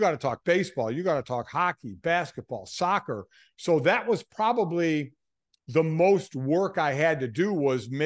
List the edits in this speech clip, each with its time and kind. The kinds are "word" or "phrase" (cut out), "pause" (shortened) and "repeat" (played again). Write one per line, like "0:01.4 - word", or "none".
none